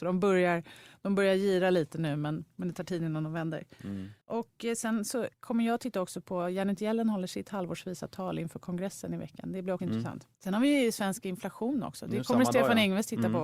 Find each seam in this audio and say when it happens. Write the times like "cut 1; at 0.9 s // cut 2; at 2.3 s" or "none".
cut 1; at 4.2 s // cut 2; at 5.3 s // cut 3; at 10.3 s